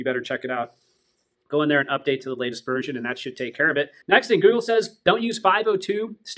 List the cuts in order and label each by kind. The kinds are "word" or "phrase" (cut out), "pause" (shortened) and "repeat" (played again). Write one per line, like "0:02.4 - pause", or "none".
0:04.0 - pause

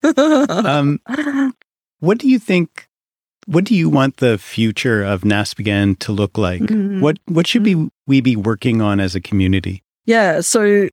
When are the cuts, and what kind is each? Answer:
none

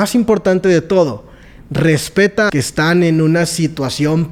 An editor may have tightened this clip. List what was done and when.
0:02.5 - phrase

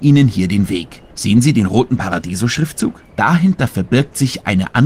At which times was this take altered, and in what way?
0:01.1 - pause
0:03.1 - pause

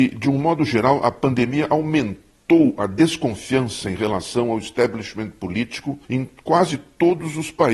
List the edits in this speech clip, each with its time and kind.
0:06.0 - pause

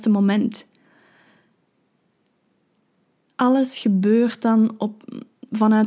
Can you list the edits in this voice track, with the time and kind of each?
none

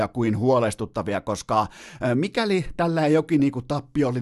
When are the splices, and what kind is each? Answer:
none

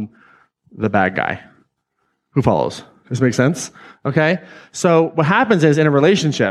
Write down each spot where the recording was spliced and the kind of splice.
none

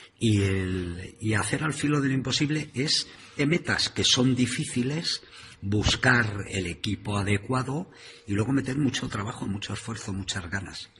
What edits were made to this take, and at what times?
0:03.4 - word
0:06.5 - word

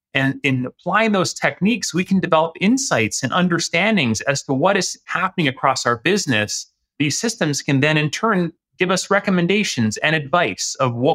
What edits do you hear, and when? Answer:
none

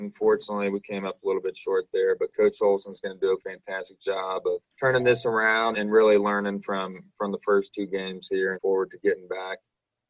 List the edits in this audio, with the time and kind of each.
0:04.7 - pause
0:05.7 - word
0:08.6 - phrase

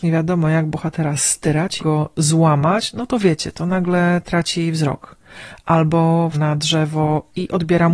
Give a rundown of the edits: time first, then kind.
0:01.8 - word
0:06.3 - word

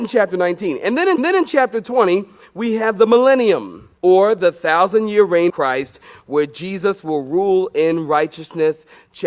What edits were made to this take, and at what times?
0:01.2 - repeat
0:04.0 - pause
0:05.5 - word

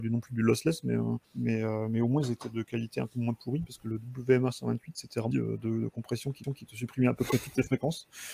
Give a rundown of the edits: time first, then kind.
0:01.2 - pause
0:05.3 - phrase
0:06.4 - repeat

